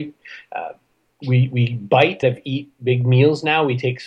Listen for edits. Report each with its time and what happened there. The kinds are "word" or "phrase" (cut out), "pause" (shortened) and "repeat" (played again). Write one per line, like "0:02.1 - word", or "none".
0:02.2 - word